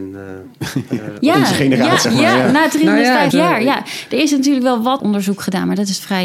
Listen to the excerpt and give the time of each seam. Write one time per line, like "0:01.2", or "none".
0:02.0
0:03.3
0:05.0